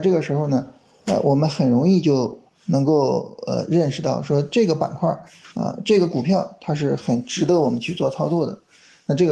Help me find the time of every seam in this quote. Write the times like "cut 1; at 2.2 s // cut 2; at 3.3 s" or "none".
cut 1; at 5.5 s